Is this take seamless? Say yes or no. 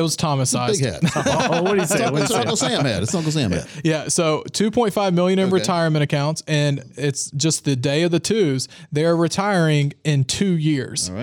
yes